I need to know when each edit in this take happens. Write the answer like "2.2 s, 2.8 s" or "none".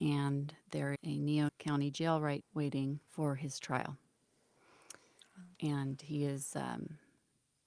1.0 s, 1.5 s, 2.4 s, 3.1 s, 5.5 s